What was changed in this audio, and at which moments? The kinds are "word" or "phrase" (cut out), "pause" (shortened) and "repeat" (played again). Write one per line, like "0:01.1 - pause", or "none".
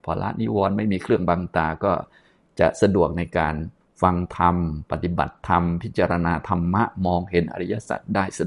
0:03.8 - pause

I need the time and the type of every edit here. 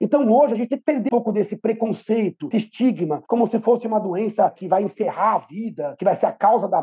0:01.1 - word
0:02.5 - word

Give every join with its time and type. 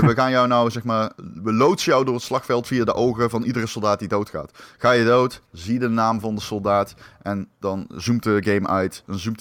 none

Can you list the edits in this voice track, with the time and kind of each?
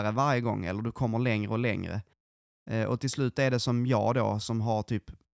none

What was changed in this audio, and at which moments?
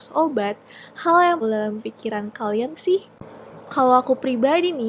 0:01.4 - phrase
0:02.8 - phrase

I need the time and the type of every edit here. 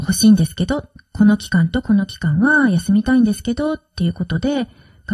none

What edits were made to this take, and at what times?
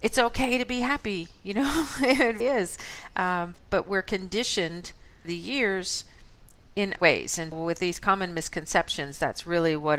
0:02.4 - word
0:03.5 - word
0:05.2 - word
0:07.0 - word
0:07.5 - word

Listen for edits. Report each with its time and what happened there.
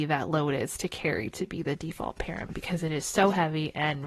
none

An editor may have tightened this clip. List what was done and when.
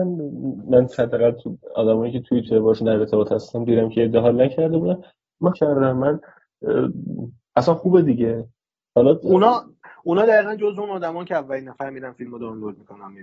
0:02.5 - word
0:05.5 - phrase

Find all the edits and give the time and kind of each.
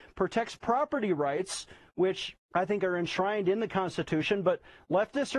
0:02.4 - pause

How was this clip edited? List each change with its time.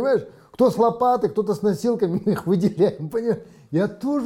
none

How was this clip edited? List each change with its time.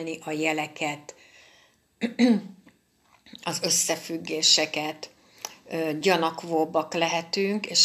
none

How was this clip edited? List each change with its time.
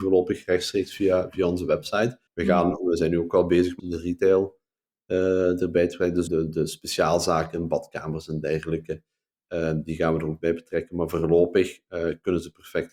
0:02.3 - pause
0:03.8 - phrase
0:06.3 - word

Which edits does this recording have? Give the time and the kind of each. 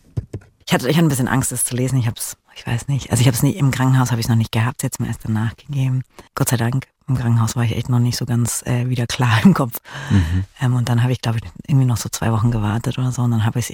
0:02.4 - pause
0:06.3 - pause

